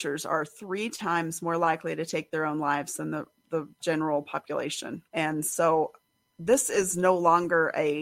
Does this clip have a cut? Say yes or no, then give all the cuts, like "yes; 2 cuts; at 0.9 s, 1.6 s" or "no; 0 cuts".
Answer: yes; 2 cuts; at 5.1 s, 6.1 s